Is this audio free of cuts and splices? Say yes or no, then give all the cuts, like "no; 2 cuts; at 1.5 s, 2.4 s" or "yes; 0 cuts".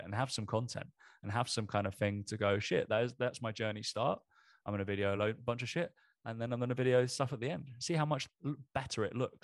yes; 0 cuts